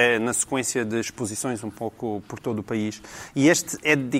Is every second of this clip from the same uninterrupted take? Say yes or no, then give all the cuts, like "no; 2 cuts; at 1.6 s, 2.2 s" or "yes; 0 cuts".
yes; 0 cuts